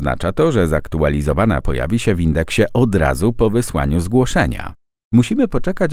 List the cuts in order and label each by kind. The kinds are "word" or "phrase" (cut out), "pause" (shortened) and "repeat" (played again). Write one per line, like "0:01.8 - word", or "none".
0:01.6 - word